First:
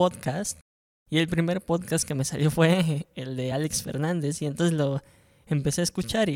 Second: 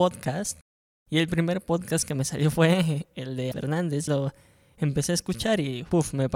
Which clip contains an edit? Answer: second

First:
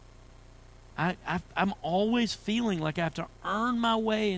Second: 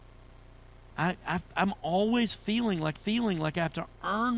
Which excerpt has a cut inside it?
second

